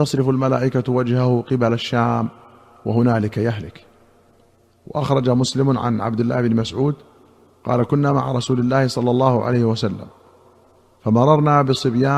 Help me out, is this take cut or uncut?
uncut